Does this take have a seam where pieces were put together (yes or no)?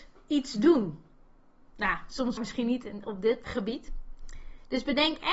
yes